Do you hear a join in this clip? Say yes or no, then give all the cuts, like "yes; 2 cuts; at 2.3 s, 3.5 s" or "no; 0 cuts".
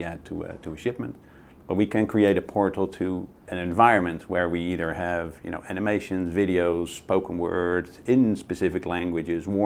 no; 0 cuts